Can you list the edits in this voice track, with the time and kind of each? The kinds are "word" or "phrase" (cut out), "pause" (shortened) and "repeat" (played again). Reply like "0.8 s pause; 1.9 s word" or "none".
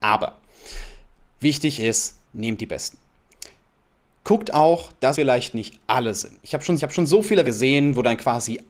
2.2 s pause; 5.1 s word; 6.8 s repeat; 7.4 s word